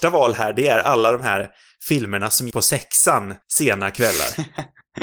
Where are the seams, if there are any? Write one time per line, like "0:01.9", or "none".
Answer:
0:02.5
0:03.4